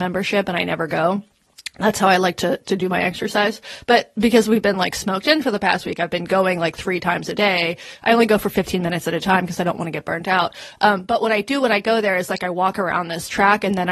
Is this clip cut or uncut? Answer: uncut